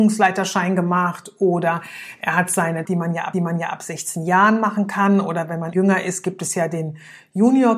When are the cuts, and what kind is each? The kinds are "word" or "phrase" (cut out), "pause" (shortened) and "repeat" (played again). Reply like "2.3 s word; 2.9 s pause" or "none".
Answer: 2.8 s phrase; 3.3 s repeat; 5.7 s word